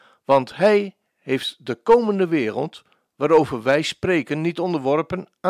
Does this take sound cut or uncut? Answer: uncut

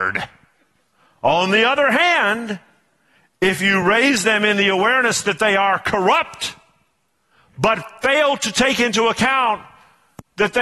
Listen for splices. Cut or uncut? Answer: uncut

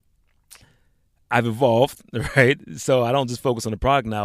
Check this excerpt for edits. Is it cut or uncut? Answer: uncut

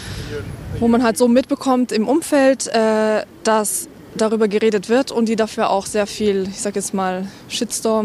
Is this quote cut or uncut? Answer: uncut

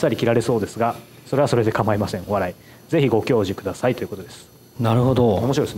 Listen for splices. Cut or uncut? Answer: cut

